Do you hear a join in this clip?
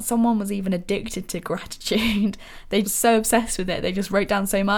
yes; 1 cut; at 2.8 s

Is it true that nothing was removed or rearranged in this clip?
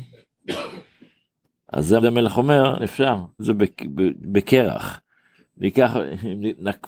no; 3 cuts; at 2.0 s, 2.8 s, 3.4 s

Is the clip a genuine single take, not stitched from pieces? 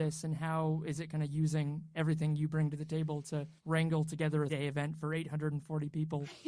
no; 2 cuts; at 3.6 s, 4.5 s

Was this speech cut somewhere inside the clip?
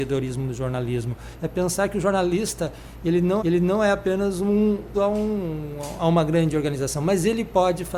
yes; 2 cuts; at 3.4 s, 4.9 s

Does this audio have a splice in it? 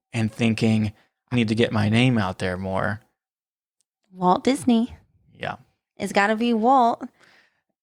yes; 1 cut; at 1.3 s

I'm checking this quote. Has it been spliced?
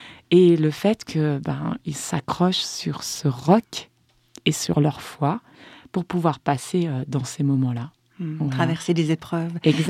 no; 0 cuts

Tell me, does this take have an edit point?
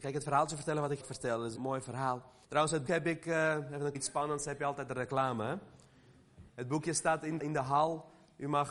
yes; 7 cuts; at 1.0 s, 1.5 s, 2.4 s, 2.9 s, 3.9 s, 6.5 s, 7.4 s

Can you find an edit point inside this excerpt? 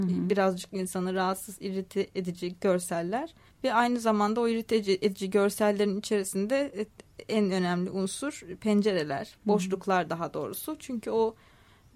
yes; 1 cut; at 3.5 s

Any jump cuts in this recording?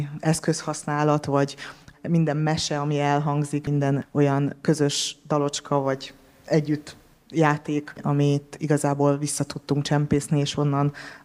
no; 0 cuts

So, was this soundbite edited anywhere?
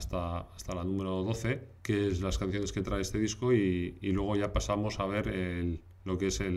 yes; 1 cut; at 1.8 s

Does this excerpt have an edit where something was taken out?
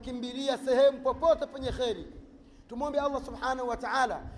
no; 0 cuts

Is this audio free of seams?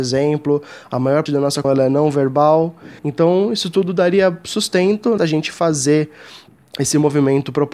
no; 5 cuts; at 1.3 s, 1.6 s, 3.0 s, 5.2 s, 6.5 s

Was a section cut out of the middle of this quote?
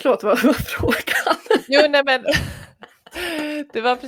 no; 0 cuts

